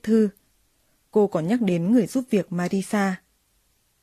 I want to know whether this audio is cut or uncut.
uncut